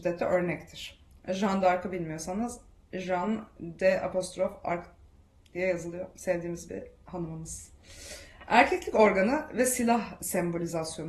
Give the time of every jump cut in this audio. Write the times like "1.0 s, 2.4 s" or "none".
none